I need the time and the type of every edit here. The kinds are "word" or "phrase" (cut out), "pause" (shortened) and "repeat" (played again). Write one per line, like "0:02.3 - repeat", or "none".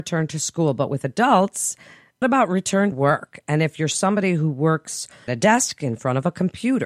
0:02.2 - word
0:02.9 - word
0:05.3 - word

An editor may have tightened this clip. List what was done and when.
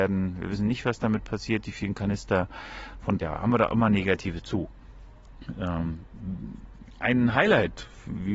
0:03.2 - word
0:04.4 - word

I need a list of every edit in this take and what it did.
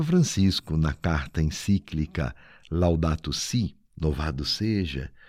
none

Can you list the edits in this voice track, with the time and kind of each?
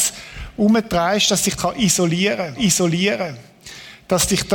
0:01.6 - word
0:02.5 - repeat

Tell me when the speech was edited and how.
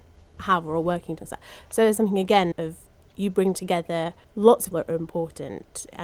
0:01.2 - word
0:02.0 - word
0:02.5 - word
0:04.2 - pause
0:04.7 - word

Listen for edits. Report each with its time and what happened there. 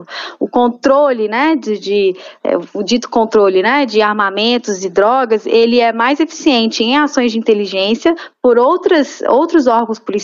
none

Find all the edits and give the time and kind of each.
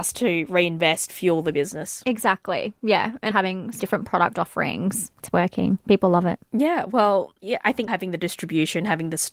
0:01.1 - word
0:03.3 - word
0:03.8 - word
0:07.9 - word

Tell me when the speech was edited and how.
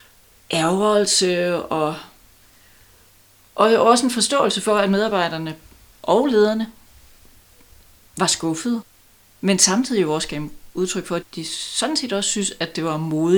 0:11.2 - word

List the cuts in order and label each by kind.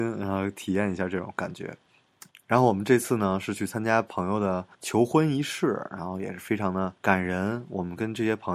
0:02.3 - pause
0:04.7 - pause
0:07.0 - pause

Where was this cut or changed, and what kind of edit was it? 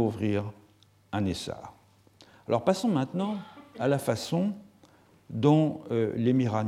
none

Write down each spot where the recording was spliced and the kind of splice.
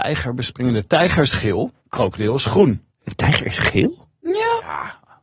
0:02.9 - pause

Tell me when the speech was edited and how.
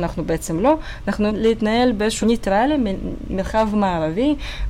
0:01.3 - word
0:02.2 - word

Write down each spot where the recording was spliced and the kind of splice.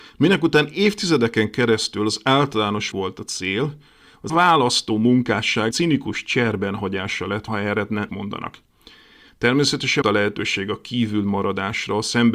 0:02.9 - word
0:04.3 - word
0:05.7 - word
0:07.5 - word
0:08.1 - word
0:10.0 - word

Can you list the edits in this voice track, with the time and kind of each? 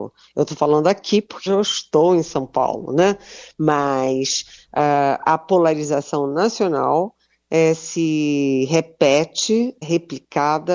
0:01.5 - word
0:09.8 - word

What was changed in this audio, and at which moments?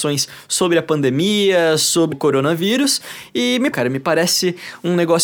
0:02.1 - word
0:03.7 - phrase

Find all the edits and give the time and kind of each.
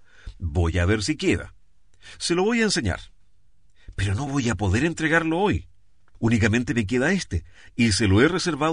none

